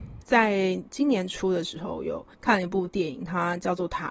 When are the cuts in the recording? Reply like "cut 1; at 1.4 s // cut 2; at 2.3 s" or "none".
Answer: cut 1; at 2.3 s